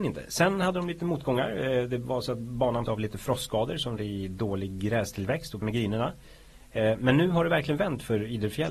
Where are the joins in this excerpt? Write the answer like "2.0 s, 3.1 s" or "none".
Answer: 2.9 s, 4.0 s, 5.6 s